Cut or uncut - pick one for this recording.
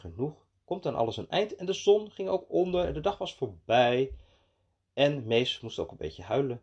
uncut